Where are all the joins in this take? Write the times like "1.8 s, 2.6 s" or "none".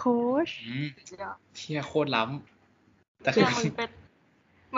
2.5 s